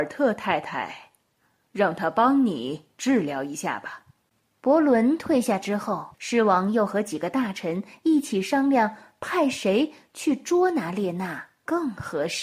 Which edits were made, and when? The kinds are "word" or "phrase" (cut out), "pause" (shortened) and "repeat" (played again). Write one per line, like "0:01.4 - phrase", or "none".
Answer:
0:04.3 - pause
0:06.1 - pause